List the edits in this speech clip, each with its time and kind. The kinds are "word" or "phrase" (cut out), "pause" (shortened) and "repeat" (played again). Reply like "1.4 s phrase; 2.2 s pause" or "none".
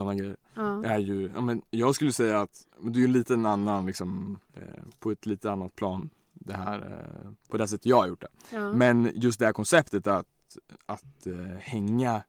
2.7 s pause; 4.4 s pause; 7.4 s pause